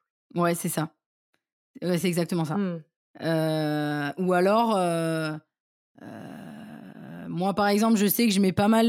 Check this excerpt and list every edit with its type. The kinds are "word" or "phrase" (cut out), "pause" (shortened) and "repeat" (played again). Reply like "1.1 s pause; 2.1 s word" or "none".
none